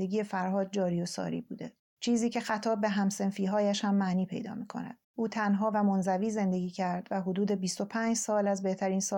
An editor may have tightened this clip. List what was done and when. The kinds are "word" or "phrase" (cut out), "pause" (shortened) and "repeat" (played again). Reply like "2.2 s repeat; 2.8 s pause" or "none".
1.8 s pause; 5.0 s pause

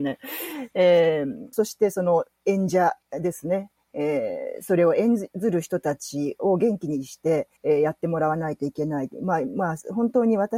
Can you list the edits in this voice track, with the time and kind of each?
1.5 s phrase; 3.0 s pause; 7.6 s pause

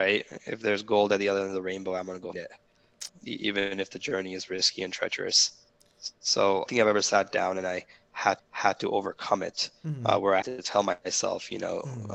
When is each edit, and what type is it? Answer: 2.3 s word; 3.1 s word; 6.7 s phrase; 8.4 s repeat; 10.4 s word

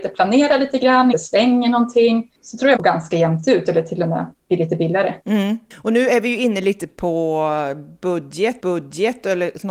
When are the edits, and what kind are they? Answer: 1.1 s word; 2.8 s phrase; 5.2 s pause; 8.6 s repeat

